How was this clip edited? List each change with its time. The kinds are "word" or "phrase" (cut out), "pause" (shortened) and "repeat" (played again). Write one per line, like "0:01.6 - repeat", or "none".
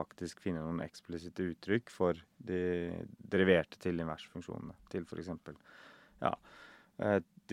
none